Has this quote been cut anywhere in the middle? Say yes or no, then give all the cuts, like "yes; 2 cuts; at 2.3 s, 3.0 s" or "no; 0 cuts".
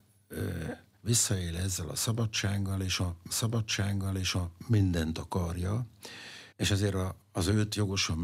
yes; 4 cuts; at 1.0 s, 3.3 s, 6.5 s, 7.2 s